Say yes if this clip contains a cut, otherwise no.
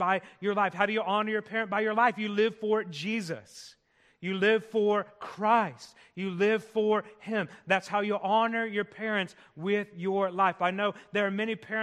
no